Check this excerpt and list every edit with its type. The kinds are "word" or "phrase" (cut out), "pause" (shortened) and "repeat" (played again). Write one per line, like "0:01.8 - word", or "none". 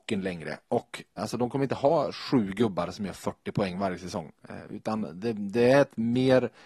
0:01.2 - word